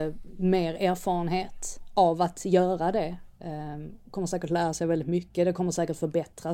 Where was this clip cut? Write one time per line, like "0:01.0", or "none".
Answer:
none